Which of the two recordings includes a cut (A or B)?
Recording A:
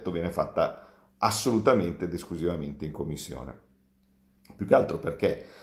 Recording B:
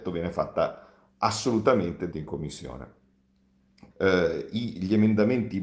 B